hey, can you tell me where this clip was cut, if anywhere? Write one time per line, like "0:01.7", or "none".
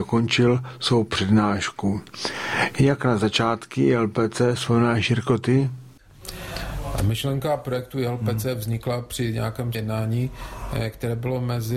0:09.7